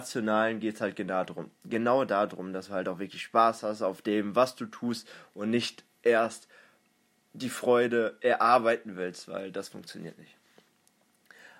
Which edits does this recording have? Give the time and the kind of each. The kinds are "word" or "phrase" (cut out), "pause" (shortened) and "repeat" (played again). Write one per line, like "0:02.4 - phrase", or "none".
none